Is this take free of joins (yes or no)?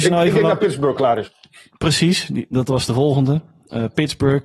yes